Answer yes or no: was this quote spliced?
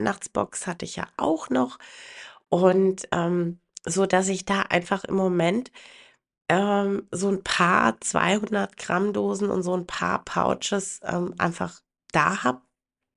no